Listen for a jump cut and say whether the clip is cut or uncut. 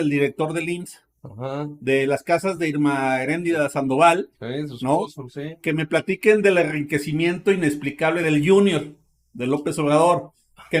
uncut